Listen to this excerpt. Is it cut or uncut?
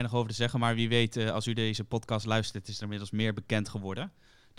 uncut